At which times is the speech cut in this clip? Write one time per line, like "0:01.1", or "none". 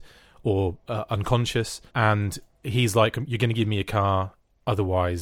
0:01.9